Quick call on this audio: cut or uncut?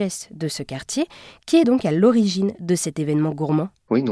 uncut